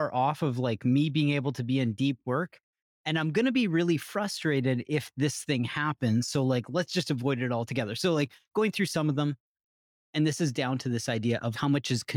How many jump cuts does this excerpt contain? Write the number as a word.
zero